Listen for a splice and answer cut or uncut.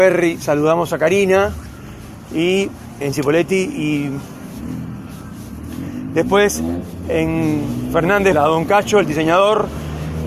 cut